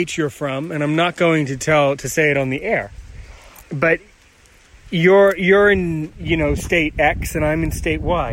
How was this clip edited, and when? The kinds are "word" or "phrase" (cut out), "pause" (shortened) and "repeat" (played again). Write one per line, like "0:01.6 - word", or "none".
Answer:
0:03.6 - word